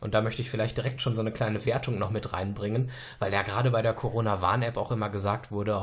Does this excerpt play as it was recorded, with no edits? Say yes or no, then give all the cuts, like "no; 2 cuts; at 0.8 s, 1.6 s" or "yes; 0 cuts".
yes; 0 cuts